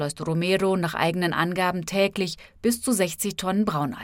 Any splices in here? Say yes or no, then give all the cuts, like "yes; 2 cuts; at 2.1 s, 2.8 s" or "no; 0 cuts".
no; 0 cuts